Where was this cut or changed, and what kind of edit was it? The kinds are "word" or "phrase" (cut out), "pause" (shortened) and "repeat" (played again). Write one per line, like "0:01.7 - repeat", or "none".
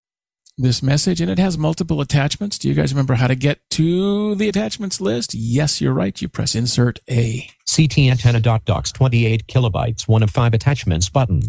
none